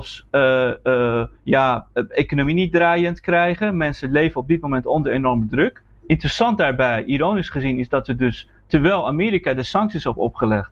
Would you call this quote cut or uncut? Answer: cut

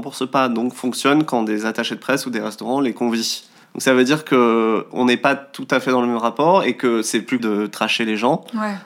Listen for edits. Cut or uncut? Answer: cut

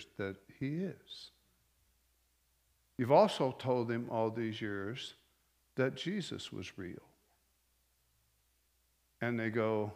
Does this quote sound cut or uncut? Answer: uncut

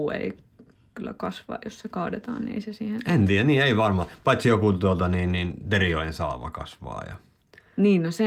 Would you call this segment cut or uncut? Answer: uncut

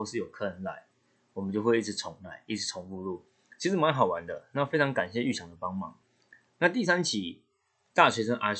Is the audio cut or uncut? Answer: uncut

